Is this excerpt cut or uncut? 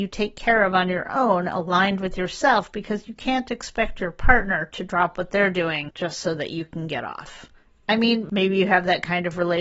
uncut